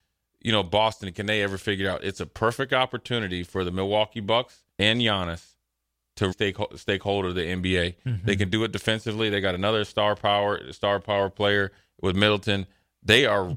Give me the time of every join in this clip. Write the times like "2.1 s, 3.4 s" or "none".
4.7 s, 6.3 s